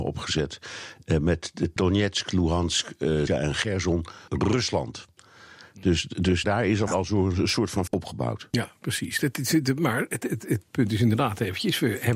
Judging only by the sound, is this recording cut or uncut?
cut